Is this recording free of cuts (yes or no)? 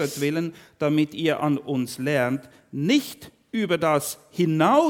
yes